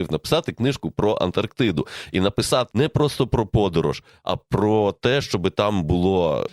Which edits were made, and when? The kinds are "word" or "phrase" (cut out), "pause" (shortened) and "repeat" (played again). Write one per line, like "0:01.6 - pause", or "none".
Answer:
0:02.7 - word